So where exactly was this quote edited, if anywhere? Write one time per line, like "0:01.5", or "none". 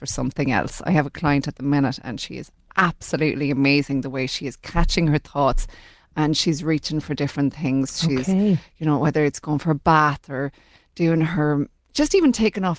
none